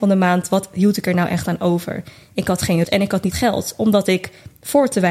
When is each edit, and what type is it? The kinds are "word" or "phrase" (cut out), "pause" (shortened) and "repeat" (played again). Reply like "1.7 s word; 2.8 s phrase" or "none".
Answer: 2.8 s word; 3.3 s word